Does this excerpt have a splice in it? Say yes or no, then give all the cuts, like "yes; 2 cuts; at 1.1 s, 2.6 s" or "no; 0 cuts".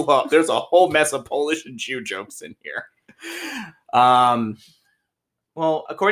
no; 0 cuts